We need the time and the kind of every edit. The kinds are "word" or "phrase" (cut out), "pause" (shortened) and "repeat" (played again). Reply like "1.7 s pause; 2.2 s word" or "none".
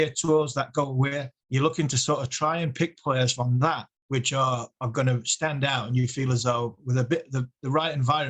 1.4 s pause; 4.0 s pause